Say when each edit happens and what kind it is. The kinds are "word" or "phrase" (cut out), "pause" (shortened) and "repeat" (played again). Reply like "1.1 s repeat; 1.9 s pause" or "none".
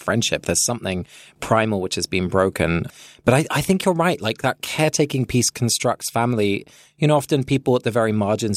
none